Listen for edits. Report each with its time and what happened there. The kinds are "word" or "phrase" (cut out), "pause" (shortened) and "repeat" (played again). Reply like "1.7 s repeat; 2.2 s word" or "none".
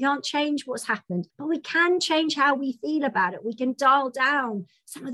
1.3 s pause